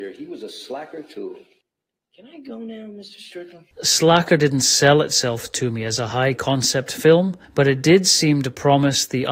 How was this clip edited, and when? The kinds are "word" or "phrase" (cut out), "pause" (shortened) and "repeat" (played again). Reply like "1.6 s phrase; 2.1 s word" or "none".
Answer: 1.6 s pause; 3.7 s pause; 7.4 s pause